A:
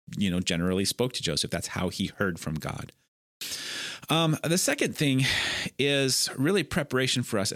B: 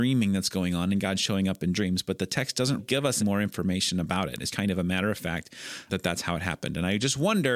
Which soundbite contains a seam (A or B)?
B